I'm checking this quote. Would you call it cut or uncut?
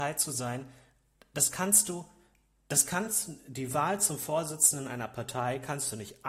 uncut